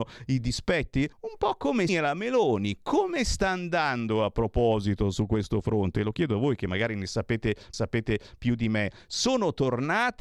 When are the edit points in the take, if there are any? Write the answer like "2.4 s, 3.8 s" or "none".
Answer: 1.1 s, 1.9 s, 7.7 s